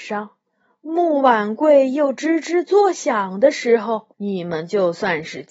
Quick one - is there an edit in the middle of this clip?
yes; 1 cut; at 4.1 s

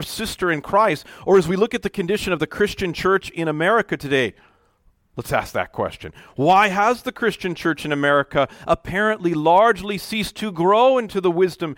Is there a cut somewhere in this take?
no; 0 cuts

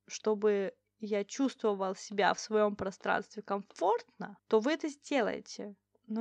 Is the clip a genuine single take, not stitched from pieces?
no; 1 cut; at 4.4 s

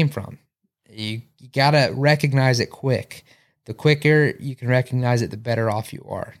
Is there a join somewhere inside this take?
no; 0 cuts

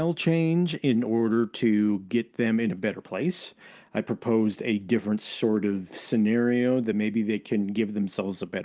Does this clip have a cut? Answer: no; 0 cuts

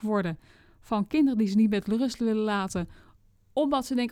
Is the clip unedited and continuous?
yes; 0 cuts

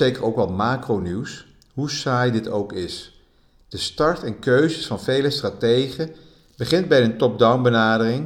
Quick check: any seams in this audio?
no; 0 cuts

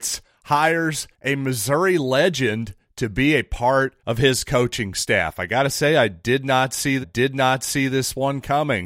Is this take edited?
yes; 3 cuts; at 1.1 s, 4.0 s, 7.0 s

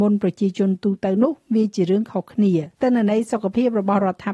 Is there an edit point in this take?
yes; 1 cut; at 2.7 s

